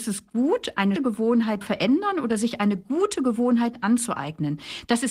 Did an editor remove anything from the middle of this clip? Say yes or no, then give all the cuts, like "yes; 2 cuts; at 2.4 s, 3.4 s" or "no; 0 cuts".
yes; 2 cuts; at 1.0 s, 1.6 s